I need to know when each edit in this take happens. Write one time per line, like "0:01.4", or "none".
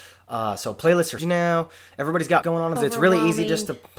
0:01.2
0:02.4
0:02.8